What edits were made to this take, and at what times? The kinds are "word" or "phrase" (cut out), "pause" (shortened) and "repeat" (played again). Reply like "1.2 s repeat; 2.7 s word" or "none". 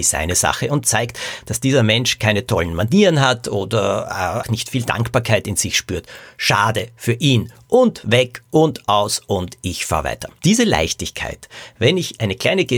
4.4 s word; 10.4 s pause